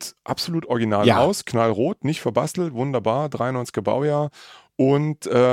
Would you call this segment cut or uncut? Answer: uncut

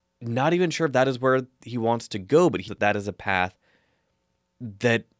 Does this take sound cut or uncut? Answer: cut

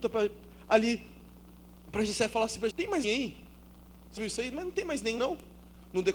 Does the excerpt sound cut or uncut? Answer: cut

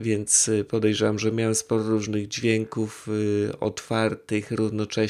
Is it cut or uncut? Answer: uncut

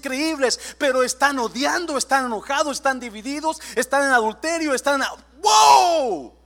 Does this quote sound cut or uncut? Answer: uncut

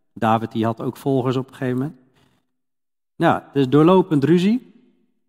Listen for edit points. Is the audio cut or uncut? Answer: uncut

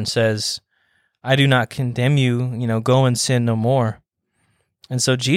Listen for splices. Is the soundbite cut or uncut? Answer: uncut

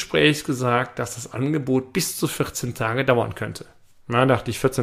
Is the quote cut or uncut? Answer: uncut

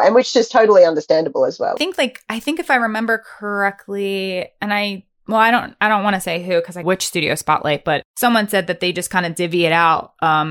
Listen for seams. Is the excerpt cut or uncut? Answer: cut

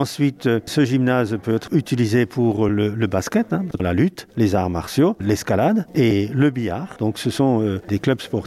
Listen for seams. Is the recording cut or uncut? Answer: uncut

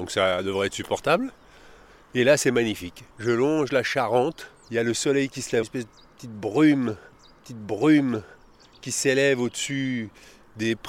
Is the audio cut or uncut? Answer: cut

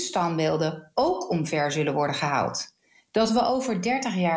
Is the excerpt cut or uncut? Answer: uncut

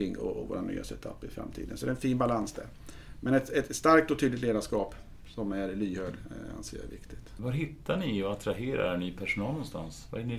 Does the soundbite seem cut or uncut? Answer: uncut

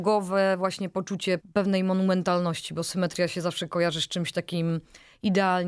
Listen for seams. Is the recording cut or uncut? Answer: cut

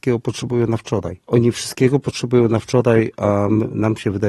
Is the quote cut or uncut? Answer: cut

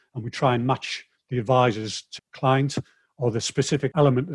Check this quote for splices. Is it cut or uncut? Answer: cut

